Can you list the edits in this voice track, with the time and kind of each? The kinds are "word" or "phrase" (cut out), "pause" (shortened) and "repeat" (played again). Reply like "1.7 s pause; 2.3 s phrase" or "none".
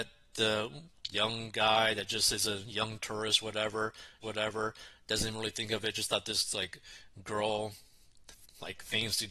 4.2 s repeat